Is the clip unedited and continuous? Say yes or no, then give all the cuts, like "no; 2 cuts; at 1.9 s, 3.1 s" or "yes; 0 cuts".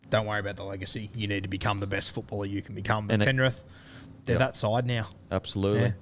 yes; 0 cuts